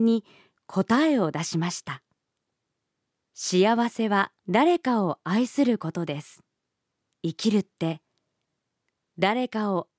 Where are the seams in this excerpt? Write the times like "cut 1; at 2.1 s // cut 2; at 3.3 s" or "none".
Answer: cut 1; at 2.7 s // cut 2; at 4.4 s // cut 3; at 7.0 s